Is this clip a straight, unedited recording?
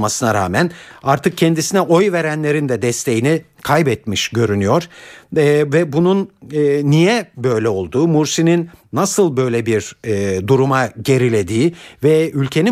yes; 0 cuts

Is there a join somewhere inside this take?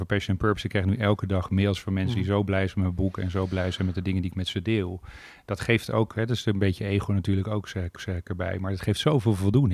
yes; 1 cut; at 8.0 s

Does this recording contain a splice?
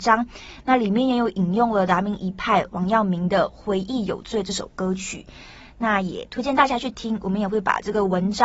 no; 0 cuts

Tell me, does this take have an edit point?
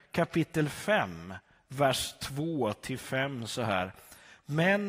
no; 0 cuts

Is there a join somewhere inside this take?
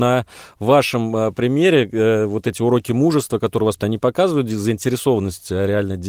yes; 1 cut; at 3.8 s

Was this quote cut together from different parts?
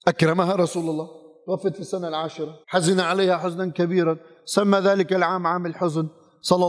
yes; 1 cut; at 2.6 s

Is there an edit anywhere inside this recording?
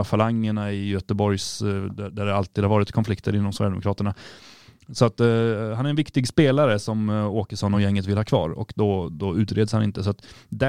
no; 0 cuts

